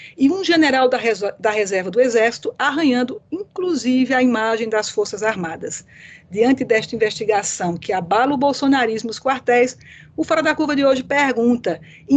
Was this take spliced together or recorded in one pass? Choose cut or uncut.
uncut